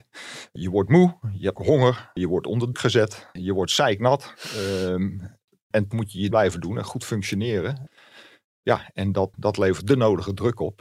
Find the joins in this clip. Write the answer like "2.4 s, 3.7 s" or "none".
1.6 s, 2.7 s, 5.9 s, 6.3 s, 9.3 s, 9.8 s